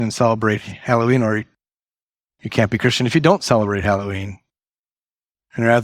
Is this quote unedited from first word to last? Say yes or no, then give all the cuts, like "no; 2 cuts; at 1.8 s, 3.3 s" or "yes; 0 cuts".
yes; 0 cuts